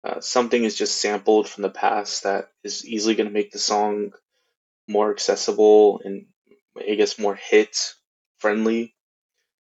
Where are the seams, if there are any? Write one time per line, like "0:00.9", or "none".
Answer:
none